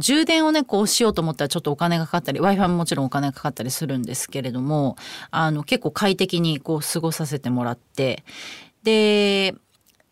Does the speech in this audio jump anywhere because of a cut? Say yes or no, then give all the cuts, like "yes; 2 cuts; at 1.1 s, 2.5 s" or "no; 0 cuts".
no; 0 cuts